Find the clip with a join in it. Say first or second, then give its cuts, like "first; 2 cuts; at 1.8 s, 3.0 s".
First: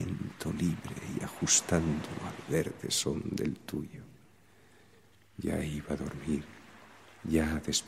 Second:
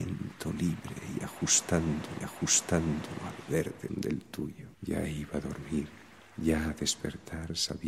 second; 4 cuts; at 2.2 s, 3.9 s, 4.7 s, 6.2 s